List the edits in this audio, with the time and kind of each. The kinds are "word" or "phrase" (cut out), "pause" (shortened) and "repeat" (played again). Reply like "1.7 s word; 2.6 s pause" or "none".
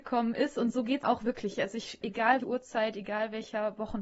1.0 s word; 2.0 s word; 2.4 s word